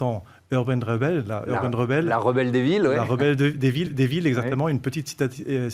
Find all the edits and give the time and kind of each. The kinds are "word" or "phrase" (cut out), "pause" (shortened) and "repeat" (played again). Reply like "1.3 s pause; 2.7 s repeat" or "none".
3.9 s repeat